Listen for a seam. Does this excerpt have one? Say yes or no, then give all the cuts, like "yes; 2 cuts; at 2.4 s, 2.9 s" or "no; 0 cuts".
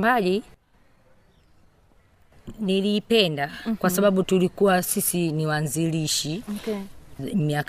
no; 0 cuts